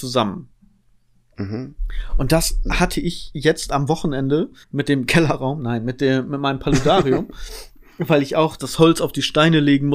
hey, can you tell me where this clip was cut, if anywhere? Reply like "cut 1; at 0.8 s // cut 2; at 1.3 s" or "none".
cut 1; at 4.6 s // cut 2; at 8.6 s